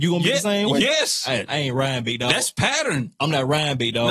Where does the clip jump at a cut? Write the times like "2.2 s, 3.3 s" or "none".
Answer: 1.5 s